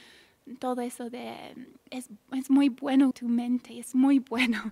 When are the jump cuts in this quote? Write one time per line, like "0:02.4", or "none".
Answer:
0:01.9
0:03.1